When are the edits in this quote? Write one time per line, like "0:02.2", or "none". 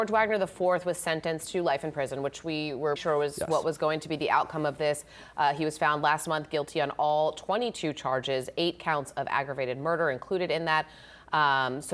0:03.0